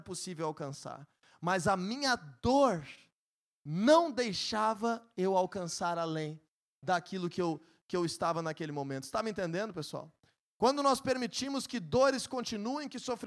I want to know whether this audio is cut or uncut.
uncut